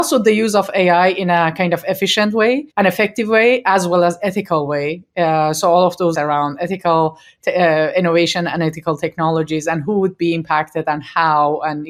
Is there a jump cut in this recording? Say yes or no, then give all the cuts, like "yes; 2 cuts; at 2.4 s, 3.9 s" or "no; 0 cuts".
yes; 2 cuts; at 2.7 s, 6.1 s